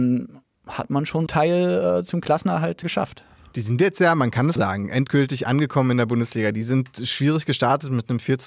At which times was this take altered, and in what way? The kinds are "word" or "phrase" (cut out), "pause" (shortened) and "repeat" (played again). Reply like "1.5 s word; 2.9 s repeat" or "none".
1.3 s phrase; 2.8 s word; 4.6 s word